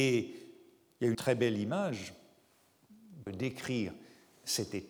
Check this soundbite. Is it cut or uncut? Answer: cut